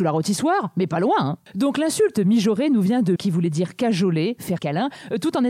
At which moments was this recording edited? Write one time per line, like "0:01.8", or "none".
0:03.2
0:04.6

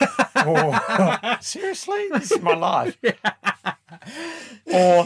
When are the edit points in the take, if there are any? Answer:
0:01.4

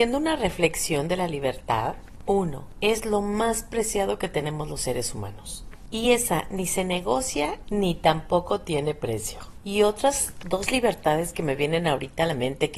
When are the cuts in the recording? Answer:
none

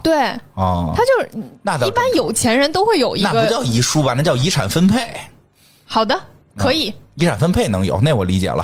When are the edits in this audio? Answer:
none

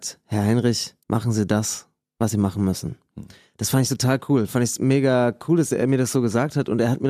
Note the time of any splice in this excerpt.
0:01.0

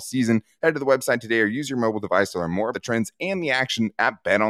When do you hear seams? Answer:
0:02.7

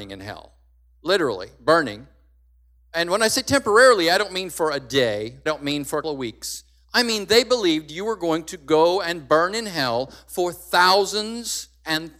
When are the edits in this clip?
0:05.5
0:06.0

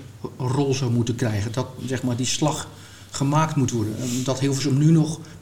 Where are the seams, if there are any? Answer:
none

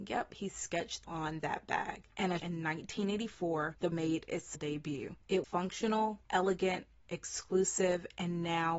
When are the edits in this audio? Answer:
0:01.0
0:02.4
0:03.9
0:04.5
0:05.4
0:06.2

